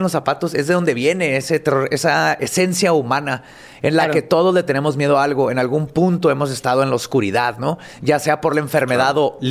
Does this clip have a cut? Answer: no; 0 cuts

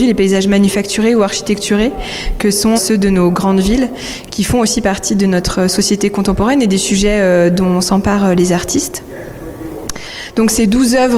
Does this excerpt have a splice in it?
yes; 1 cut; at 2.8 s

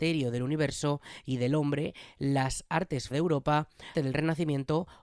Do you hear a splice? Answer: yes; 2 cuts; at 3.1 s, 3.9 s

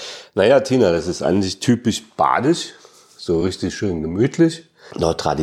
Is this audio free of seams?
yes; 0 cuts

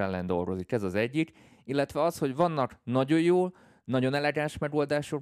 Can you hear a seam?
no; 0 cuts

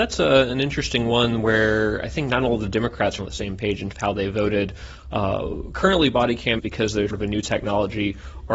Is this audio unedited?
no; 4 cuts; at 3.2 s, 3.9 s, 6.6 s, 7.1 s

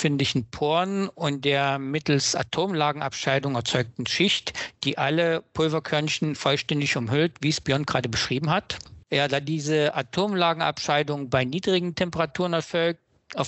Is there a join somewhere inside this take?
yes; 1 cut; at 9.0 s

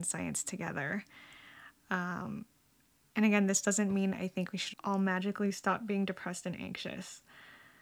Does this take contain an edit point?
yes; 1 cut; at 4.7 s

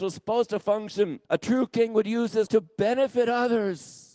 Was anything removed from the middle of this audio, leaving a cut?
yes; 2 cuts; at 1.2 s, 2.5 s

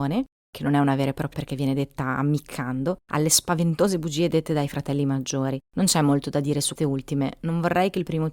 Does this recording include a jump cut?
yes; 4 cuts; at 1.3 s, 3.0 s, 5.7 s, 6.8 s

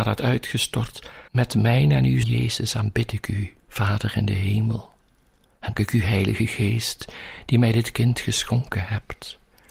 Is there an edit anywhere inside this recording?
yes; 4 cuts; at 1.3 s, 2.2 s, 3.6 s, 5.8 s

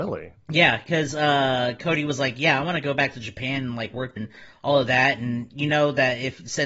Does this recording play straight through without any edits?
no; 1 cut; at 4.2 s

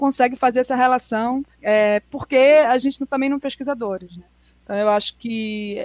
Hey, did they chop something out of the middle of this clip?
yes; 2 cuts; at 1.5 s, 3.4 s

